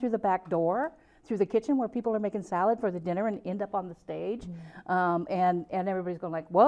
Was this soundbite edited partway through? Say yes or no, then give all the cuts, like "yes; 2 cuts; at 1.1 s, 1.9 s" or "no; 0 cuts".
no; 0 cuts